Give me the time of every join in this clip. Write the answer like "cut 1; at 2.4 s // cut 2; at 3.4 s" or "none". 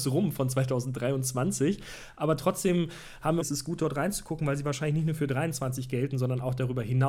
cut 1; at 3.4 s